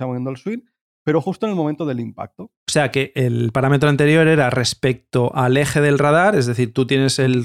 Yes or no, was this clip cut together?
yes